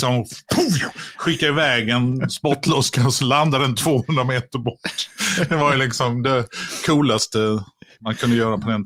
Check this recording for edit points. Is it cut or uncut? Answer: uncut